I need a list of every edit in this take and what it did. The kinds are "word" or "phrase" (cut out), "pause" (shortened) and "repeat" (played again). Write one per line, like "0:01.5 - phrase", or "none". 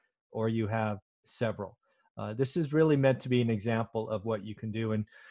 0:01.0 - pause